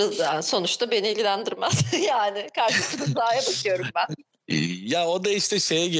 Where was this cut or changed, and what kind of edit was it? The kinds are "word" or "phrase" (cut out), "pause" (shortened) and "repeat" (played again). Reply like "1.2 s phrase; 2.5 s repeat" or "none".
none